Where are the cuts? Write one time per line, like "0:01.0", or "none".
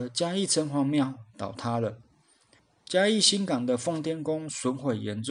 none